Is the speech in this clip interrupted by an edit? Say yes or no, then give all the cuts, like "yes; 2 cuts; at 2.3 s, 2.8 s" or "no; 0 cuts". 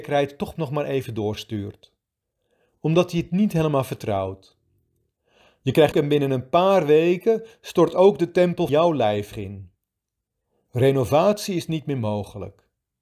yes; 3 cuts; at 5.9 s, 8.7 s, 9.3 s